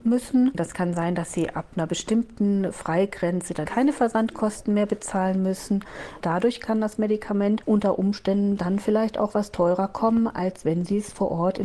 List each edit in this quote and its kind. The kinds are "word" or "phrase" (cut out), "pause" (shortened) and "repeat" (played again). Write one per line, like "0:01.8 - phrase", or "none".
0:03.6 - word